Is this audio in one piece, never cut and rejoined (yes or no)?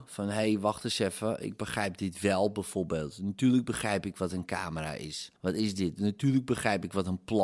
no